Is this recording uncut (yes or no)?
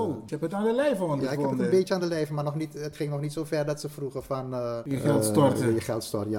yes